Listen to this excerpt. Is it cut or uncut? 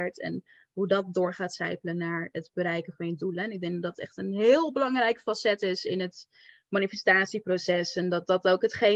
uncut